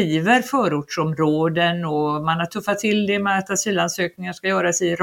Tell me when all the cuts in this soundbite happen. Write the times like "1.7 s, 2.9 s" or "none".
none